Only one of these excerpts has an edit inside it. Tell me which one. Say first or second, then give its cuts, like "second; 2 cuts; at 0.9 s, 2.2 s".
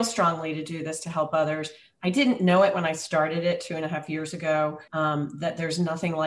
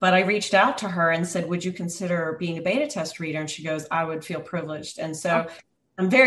first; 1 cut; at 4.9 s